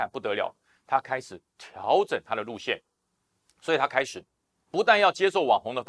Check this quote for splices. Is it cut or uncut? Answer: uncut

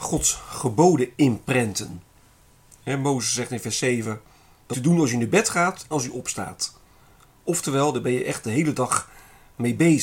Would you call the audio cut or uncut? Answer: cut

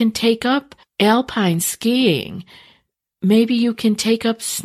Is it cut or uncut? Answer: uncut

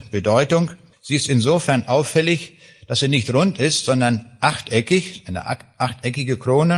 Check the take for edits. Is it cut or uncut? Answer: uncut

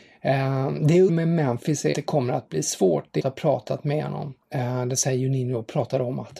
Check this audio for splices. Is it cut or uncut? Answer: cut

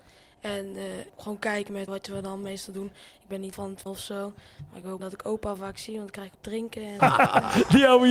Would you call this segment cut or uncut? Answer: cut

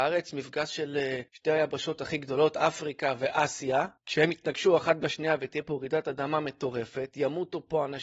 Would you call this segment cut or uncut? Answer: cut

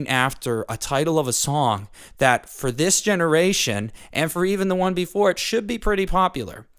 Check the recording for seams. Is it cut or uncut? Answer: uncut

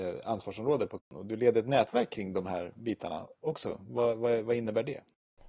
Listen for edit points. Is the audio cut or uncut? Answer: uncut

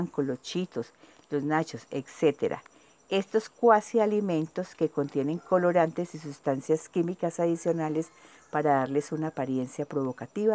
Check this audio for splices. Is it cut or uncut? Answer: uncut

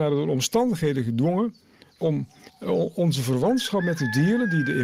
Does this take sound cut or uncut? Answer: uncut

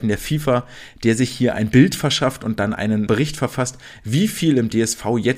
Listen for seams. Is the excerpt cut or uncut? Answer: cut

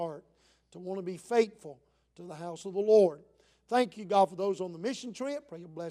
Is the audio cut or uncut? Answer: uncut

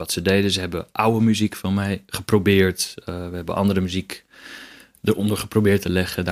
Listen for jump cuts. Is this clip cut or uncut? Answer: uncut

